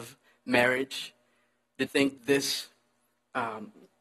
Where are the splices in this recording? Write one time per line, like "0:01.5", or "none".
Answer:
0:01.9
0:02.2